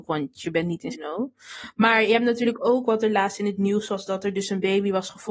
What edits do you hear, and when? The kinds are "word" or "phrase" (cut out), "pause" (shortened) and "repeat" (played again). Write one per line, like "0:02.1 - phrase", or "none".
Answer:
0:00.9 - word